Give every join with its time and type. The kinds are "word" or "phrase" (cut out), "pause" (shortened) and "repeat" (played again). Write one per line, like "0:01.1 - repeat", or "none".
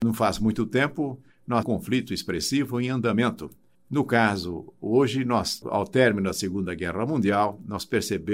0:01.6 - phrase
0:03.7 - pause

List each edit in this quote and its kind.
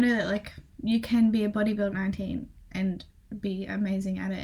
0:01.9 - word

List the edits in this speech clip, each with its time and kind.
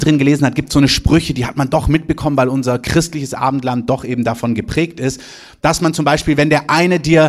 none

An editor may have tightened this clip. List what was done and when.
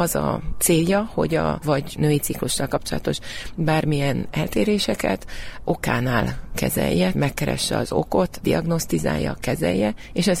0:01.6 - word
0:05.6 - word
0:07.1 - word
0:08.4 - word

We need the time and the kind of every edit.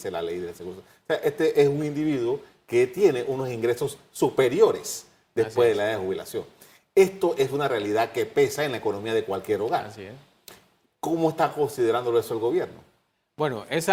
none

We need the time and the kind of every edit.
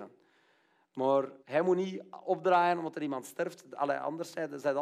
0:01.4 - pause

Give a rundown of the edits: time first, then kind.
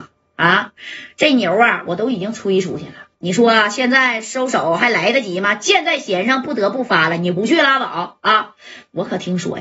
0:03.1 - pause

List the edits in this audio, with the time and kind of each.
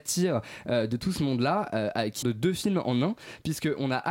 0:02.2 - phrase

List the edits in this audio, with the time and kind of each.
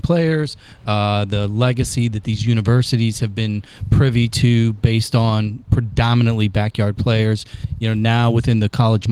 none

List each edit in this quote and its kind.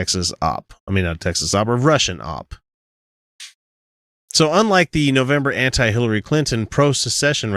none

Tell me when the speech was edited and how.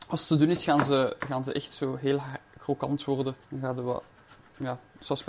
0:03.4 - pause

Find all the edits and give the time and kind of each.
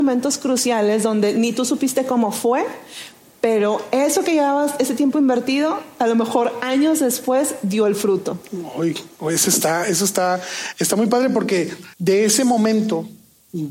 0:11.9 - pause

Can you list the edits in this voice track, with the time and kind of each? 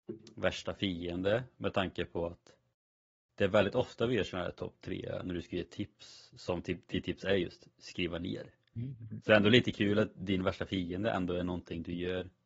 0:08.6 - pause

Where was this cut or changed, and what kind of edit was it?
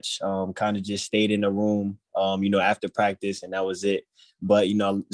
none

